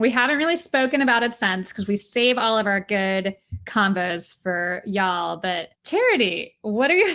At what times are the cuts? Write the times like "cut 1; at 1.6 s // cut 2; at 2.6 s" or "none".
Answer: cut 1; at 5.7 s

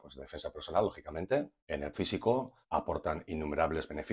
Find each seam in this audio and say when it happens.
cut 1; at 1.6 s // cut 2; at 1.9 s // cut 3; at 2.6 s

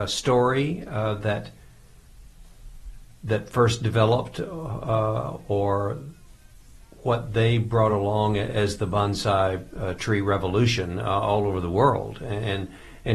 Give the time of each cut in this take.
none

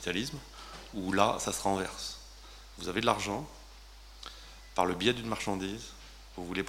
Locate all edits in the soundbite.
none

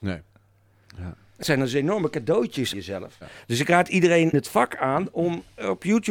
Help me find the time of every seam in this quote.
cut 1; at 1.4 s // cut 2; at 2.7 s // cut 3; at 4.3 s

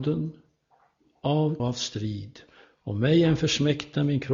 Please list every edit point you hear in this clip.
cut 1; at 1.6 s

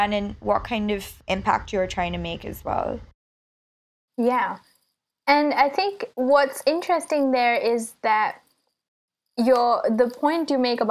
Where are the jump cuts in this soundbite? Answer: cut 1; at 6.1 s

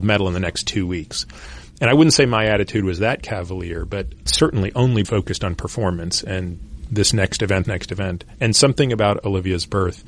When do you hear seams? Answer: cut 1; at 4.3 s // cut 2; at 5.0 s // cut 3; at 7.6 s

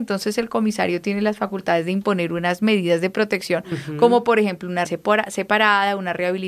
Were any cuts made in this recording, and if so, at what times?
cut 1; at 4.8 s

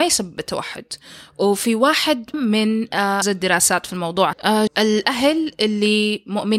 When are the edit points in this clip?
cut 1; at 2.3 s // cut 2; at 3.2 s // cut 3; at 4.3 s // cut 4; at 4.7 s

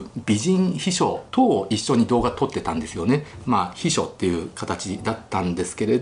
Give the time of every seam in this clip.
cut 1; at 1.3 s

